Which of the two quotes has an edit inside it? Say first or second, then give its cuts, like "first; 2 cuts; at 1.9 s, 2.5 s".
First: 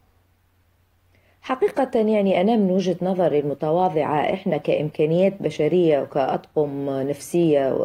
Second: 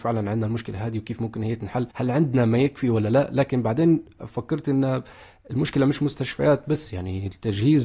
second; 1 cut; at 1.9 s